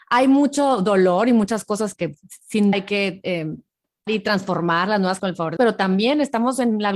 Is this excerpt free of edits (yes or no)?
no